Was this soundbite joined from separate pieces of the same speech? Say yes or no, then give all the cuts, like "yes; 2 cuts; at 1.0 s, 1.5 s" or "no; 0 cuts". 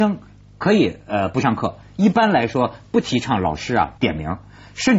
yes; 1 cut; at 4.0 s